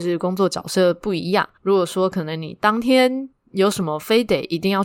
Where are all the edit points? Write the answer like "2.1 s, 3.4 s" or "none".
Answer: 1.5 s

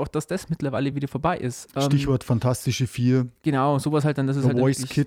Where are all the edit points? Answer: none

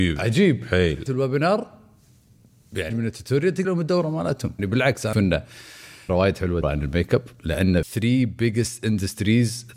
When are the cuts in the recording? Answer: 1.1 s, 2.9 s, 3.6 s, 4.6 s, 5.1 s, 6.1 s, 6.6 s, 7.8 s

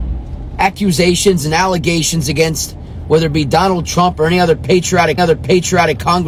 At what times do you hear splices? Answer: 5.2 s

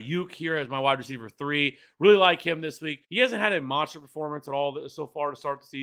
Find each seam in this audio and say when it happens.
3.0 s

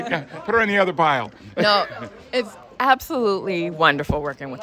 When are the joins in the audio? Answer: none

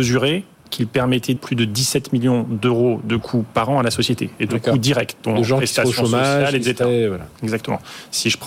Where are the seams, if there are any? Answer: 1.4 s

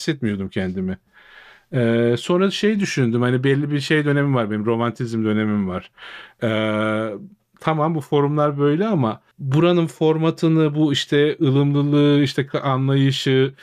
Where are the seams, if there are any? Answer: 9.3 s

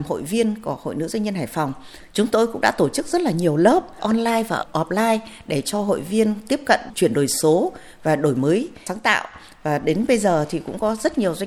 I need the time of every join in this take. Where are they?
none

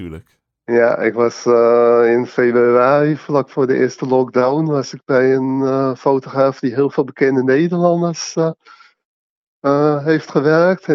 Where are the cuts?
none

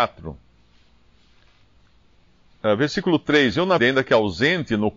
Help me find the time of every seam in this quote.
3.8 s

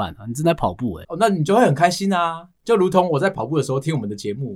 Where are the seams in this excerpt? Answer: 1.0 s

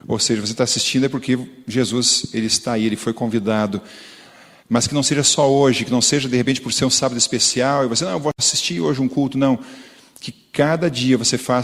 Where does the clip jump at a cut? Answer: none

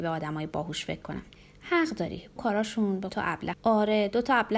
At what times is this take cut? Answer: 1.4 s, 2.4 s, 3.1 s, 3.5 s

